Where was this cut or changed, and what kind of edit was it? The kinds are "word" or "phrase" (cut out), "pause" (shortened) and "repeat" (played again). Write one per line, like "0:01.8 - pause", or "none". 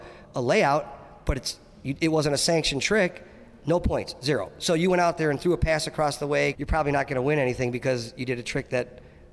0:06.5 - word